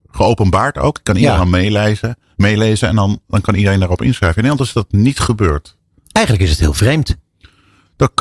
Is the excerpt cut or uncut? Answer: uncut